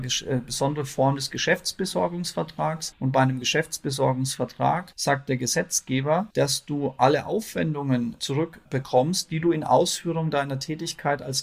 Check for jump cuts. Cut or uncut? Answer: uncut